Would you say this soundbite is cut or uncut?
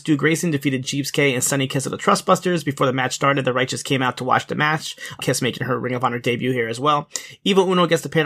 cut